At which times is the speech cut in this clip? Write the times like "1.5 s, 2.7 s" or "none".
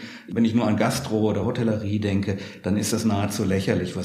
none